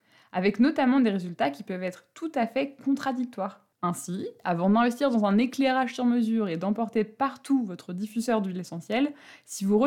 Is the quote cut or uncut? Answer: cut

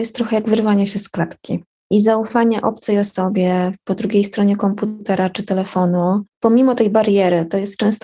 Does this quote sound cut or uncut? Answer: cut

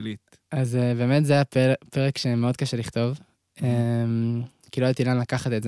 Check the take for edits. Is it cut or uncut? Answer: uncut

